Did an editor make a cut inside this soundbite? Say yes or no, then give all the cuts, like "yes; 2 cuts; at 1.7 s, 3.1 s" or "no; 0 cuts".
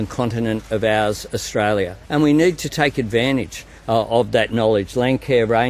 yes; 1 cut; at 2.0 s